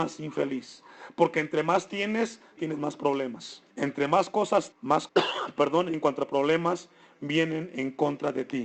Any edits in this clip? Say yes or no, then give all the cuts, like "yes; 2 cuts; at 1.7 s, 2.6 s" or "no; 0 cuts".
yes; 4 cuts; at 2.6 s, 3.7 s, 4.7 s, 5.1 s